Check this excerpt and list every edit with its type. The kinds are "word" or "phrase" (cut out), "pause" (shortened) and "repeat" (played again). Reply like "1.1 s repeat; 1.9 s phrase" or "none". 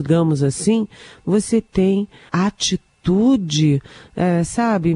2.3 s word